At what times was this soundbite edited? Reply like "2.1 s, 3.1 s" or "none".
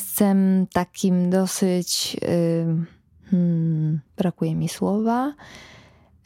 4.1 s